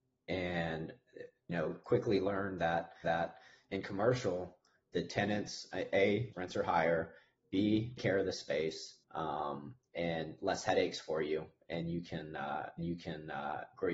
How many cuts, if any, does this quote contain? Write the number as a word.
six